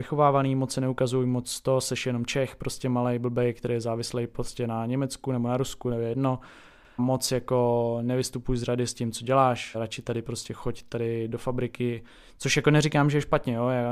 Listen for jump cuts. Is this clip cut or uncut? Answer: cut